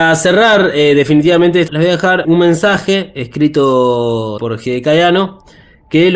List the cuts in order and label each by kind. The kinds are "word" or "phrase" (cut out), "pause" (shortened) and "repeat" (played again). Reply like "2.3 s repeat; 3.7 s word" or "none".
1.7 s word; 2.2 s word; 4.4 s word